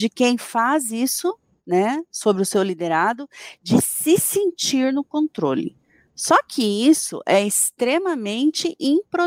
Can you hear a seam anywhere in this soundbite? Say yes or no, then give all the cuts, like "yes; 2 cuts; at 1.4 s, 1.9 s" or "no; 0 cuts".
no; 0 cuts